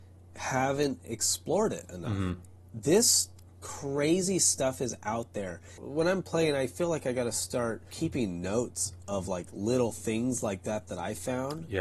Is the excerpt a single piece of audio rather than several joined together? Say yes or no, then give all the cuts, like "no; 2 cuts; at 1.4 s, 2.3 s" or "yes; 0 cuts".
yes; 0 cuts